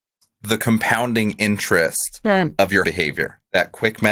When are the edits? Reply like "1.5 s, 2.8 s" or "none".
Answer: 2.8 s